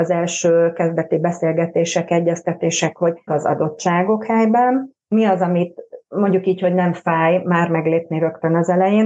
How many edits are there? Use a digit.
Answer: 2